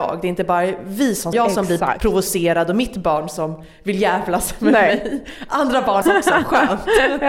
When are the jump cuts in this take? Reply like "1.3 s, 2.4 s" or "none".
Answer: 1.3 s, 6.0 s